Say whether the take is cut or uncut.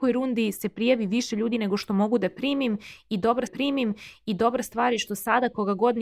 cut